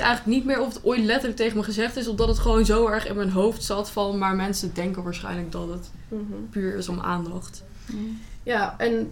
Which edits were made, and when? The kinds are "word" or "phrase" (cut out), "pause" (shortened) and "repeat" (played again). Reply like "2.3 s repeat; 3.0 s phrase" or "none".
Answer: none